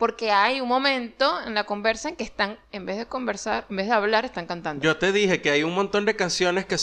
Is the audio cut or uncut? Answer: uncut